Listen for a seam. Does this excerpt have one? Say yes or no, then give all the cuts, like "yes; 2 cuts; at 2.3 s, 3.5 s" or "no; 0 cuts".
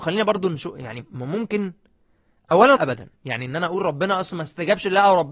yes; 2 cuts; at 2.8 s, 3.2 s